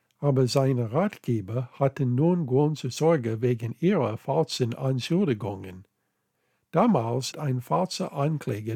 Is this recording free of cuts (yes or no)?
no